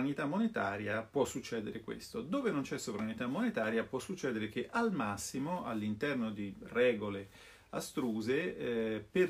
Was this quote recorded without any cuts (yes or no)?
yes